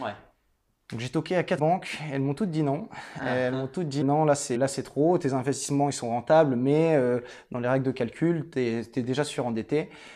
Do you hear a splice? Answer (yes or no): yes